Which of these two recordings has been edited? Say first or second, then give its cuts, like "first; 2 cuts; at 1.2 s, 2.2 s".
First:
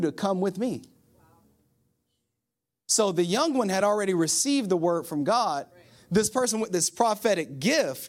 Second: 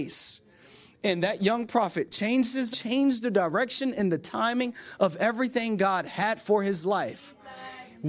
second; 1 cut; at 2.7 s